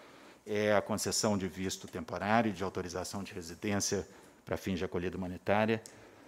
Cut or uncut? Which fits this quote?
uncut